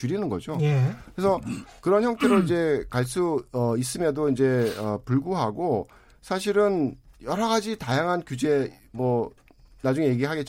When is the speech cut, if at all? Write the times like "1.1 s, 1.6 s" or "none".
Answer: none